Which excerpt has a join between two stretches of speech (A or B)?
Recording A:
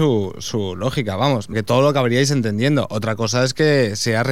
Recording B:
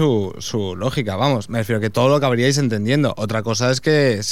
A